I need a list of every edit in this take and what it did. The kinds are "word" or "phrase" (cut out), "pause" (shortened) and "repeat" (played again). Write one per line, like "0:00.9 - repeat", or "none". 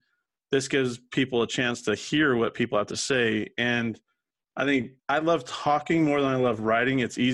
0:05.0 - word